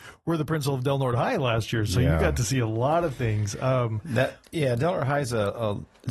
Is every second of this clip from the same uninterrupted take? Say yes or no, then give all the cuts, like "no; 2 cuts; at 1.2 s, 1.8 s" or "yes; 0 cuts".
yes; 0 cuts